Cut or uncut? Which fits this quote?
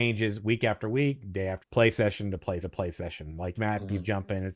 cut